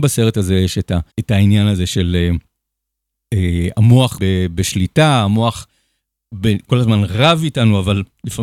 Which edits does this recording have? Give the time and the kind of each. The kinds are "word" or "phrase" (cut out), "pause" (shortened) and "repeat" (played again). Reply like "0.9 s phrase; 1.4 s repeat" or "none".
1.1 s pause; 4.2 s word